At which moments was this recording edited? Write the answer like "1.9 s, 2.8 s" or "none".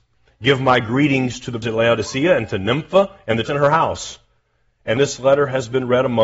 1.6 s, 3.5 s, 5.0 s